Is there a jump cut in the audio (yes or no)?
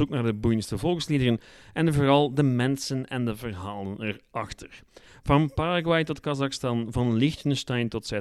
no